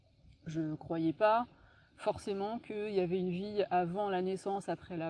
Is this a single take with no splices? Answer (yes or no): yes